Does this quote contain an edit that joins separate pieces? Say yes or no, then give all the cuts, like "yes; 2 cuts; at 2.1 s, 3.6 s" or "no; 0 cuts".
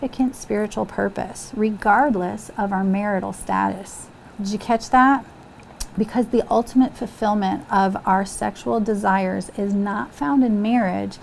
yes; 1 cut; at 4.3 s